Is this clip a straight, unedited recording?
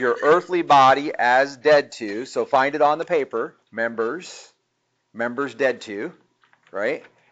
no; 1 cut; at 3.6 s

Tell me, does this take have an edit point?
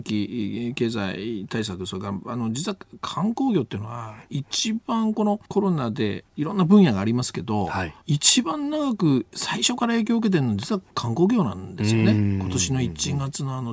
yes; 3 cuts; at 5.5 s, 8.0 s, 10.9 s

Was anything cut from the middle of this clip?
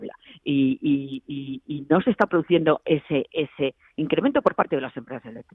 no; 0 cuts

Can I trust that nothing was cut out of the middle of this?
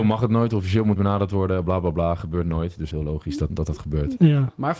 no; 3 cuts; at 1.0 s, 2.9 s, 3.5 s

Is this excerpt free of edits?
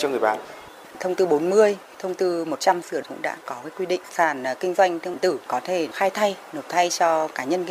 no; 2 cuts; at 3.0 s, 5.1 s

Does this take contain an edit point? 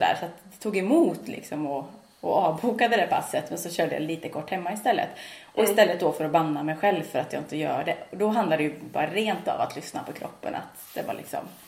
no; 0 cuts

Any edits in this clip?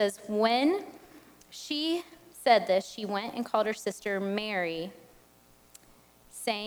no; 0 cuts

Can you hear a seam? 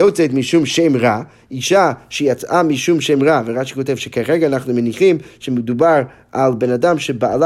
no; 0 cuts

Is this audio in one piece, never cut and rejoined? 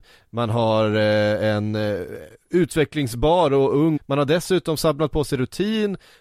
no; 1 cut; at 4.0 s

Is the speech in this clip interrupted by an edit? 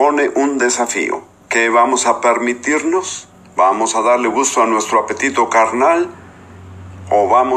no; 0 cuts

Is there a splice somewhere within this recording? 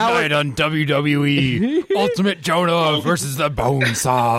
no; 0 cuts

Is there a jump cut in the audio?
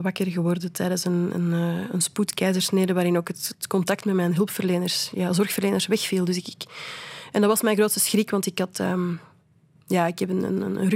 no; 0 cuts

